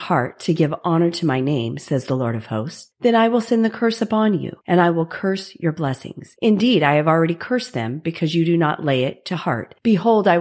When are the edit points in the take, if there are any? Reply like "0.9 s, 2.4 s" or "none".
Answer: none